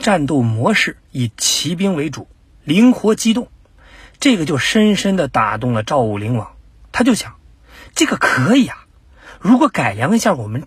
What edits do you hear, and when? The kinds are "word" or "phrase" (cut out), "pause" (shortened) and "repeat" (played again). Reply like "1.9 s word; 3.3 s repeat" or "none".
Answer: none